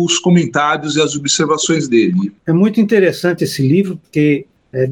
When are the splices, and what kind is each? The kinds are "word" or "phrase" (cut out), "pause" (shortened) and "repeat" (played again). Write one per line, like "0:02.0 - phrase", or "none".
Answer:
0:02.4 - pause